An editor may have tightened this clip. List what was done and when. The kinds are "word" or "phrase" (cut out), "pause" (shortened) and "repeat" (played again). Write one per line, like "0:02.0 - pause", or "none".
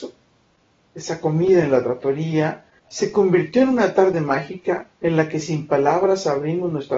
0:02.8 - pause
0:04.9 - pause